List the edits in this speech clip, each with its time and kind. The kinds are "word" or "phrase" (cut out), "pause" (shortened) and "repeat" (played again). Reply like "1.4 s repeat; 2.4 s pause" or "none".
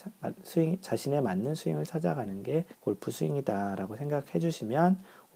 2.7 s pause